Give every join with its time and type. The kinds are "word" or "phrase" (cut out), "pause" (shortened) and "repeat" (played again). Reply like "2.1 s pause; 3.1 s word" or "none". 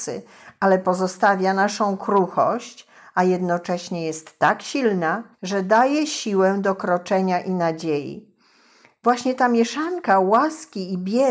5.3 s pause